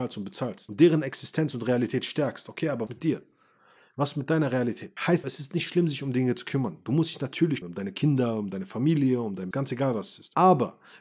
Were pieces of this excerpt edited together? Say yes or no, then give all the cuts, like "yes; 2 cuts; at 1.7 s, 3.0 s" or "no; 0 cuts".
yes; 4 cuts; at 2.9 s, 5.2 s, 7.6 s, 9.5 s